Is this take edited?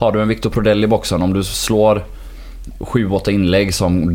no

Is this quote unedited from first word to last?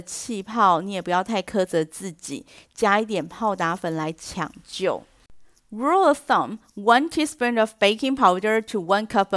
yes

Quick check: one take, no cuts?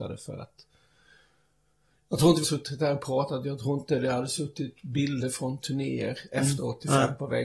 no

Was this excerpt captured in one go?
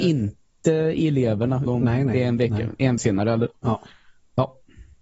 no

